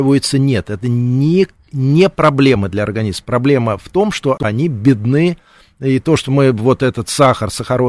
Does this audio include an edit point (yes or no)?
no